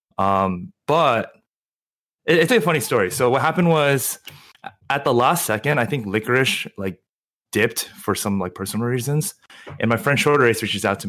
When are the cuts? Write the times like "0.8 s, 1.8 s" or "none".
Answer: 2.5 s, 4.8 s